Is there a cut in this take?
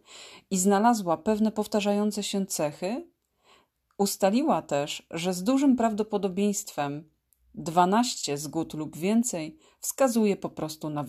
no; 0 cuts

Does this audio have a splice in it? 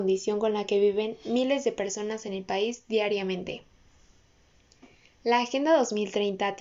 no; 0 cuts

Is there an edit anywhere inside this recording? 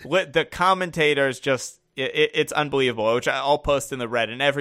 no; 0 cuts

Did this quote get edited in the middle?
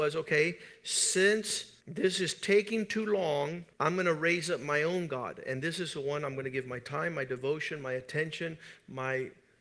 yes; 2 cuts; at 1.8 s, 3.7 s

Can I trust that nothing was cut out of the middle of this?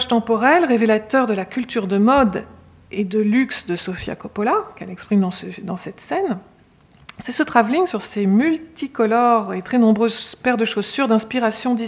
yes; 0 cuts

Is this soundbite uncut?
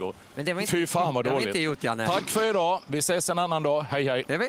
yes; 0 cuts

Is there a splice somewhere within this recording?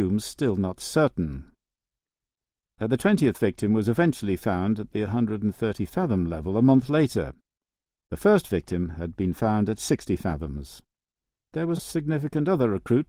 yes; 2 cuts; at 11.1 s, 11.8 s

